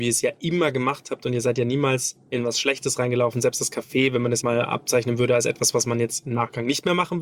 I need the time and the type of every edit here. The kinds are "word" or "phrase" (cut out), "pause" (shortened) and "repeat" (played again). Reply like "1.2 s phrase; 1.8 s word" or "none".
4.4 s word

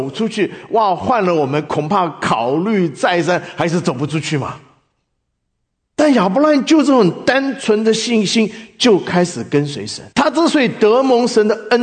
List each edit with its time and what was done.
10.1 s pause

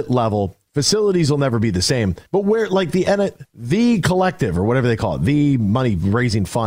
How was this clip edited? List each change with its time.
2.3 s pause

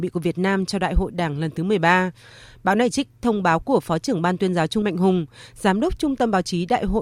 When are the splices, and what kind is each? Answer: 4.8 s phrase

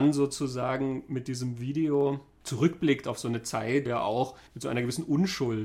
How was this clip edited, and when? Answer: 3.9 s word; 4.5 s pause

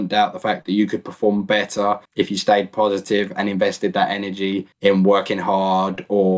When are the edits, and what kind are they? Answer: 2.1 s pause; 4.7 s pause

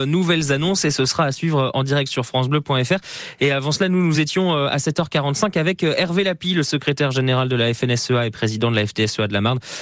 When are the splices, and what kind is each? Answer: none

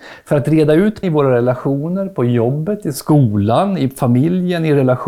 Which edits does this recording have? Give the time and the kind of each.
1.0 s word

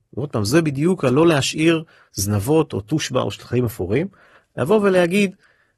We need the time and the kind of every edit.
none

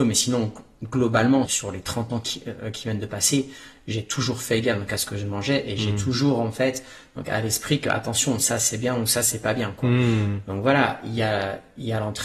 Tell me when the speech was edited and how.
1.5 s word

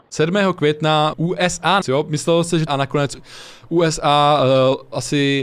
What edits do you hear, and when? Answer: 1.1 s word; 1.8 s word; 2.7 s phrase

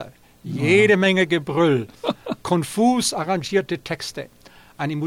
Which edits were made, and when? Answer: none

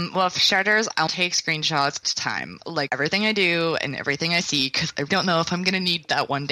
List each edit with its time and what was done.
1.1 s word; 2.0 s phrase; 2.9 s word; 5.1 s word

